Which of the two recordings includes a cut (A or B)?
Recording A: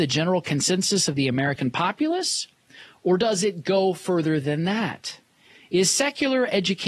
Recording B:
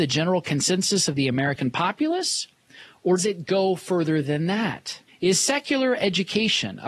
B